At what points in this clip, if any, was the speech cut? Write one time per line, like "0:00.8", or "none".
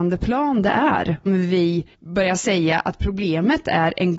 0:01.3
0:01.9